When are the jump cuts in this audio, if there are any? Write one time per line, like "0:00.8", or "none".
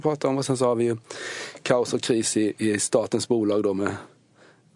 none